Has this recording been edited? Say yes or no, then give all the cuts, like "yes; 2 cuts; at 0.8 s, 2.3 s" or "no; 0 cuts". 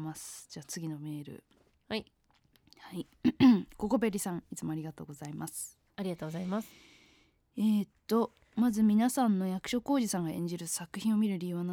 no; 0 cuts